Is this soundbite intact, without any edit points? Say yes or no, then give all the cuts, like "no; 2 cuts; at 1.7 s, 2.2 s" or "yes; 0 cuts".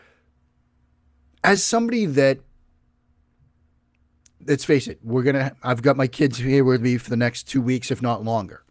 yes; 0 cuts